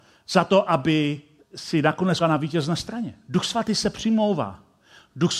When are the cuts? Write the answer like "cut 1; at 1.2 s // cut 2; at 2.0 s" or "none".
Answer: cut 1; at 1.4 s // cut 2; at 2.2 s

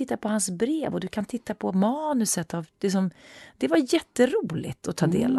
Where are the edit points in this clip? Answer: cut 1; at 4.1 s

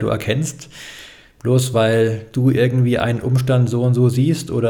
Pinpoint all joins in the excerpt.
none

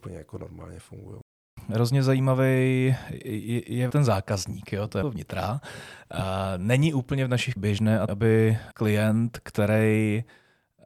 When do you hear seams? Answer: cut 1; at 3.9 s // cut 2; at 5.0 s // cut 3; at 7.6 s // cut 4; at 8.1 s // cut 5; at 8.7 s

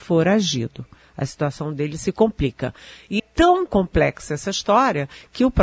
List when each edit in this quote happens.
cut 1; at 3.2 s // cut 2; at 3.7 s

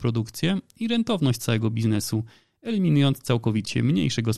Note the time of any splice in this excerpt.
none

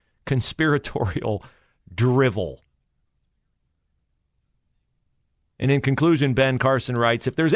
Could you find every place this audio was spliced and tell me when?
none

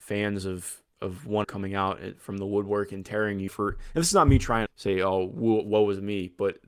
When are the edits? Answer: cut 1; at 1.4 s // cut 2; at 3.5 s // cut 3; at 4.7 s

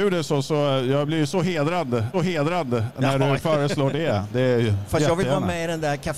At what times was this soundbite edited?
cut 1; at 2.1 s

